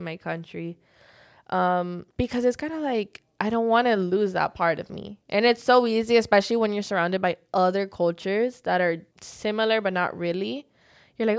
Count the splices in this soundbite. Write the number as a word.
two